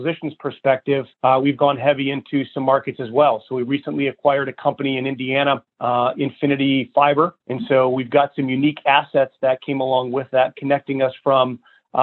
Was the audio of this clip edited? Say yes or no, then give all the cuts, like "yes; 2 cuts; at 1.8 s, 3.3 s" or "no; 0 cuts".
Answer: yes; 3 cuts; at 1.1 s, 5.7 s, 7.4 s